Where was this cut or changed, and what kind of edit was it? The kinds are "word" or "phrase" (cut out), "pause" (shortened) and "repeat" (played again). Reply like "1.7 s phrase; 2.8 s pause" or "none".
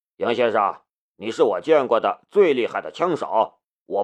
none